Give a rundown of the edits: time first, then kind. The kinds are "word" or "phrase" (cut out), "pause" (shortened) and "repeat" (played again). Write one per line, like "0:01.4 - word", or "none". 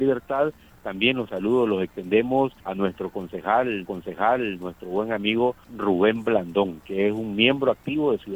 0:02.6 - pause
0:03.8 - repeat
0:05.6 - pause